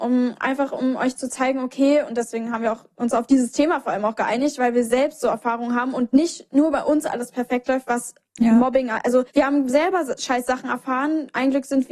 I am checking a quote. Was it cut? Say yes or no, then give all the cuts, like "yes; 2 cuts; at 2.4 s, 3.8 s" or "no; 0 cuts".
yes; 1 cut; at 9.3 s